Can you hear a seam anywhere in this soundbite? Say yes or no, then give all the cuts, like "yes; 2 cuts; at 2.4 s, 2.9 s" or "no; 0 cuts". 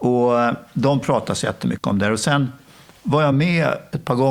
no; 0 cuts